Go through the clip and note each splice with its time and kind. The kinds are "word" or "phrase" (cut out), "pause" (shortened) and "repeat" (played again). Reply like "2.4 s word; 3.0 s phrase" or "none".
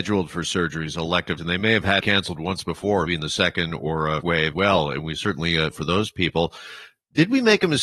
1.4 s word; 2.0 s word; 3.1 s word; 4.2 s word; 4.5 s word; 5.7 s word